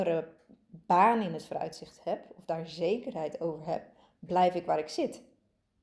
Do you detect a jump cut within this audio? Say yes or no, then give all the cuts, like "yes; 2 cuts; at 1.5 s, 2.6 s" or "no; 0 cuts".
no; 0 cuts